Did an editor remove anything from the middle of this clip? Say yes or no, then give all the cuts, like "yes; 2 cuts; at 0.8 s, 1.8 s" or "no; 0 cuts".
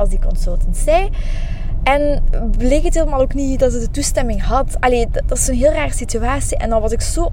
no; 0 cuts